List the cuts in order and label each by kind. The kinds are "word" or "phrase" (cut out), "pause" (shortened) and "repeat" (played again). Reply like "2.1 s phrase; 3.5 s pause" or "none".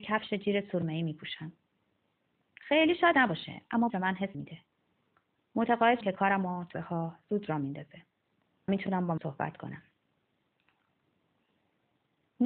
3.1 s word; 3.9 s word; 4.3 s word; 6.0 s word; 6.7 s word; 8.7 s word; 9.2 s word